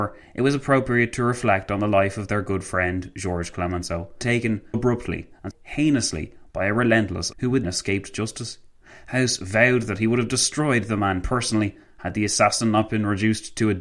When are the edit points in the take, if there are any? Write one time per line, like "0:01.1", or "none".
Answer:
0:04.2
0:04.7
0:05.5
0:07.3
0:07.6